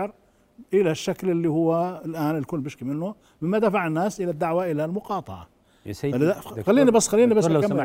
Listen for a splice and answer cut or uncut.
uncut